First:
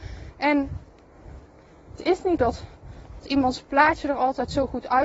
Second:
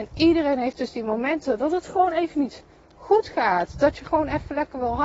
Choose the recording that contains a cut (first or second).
first